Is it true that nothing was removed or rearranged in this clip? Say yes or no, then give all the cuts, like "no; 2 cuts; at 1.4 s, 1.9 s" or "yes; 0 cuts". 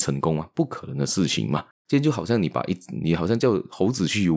no; 1 cut; at 1.7 s